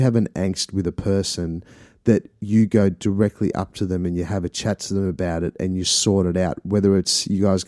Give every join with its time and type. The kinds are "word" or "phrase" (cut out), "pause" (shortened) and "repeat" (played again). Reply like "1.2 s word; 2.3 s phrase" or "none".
none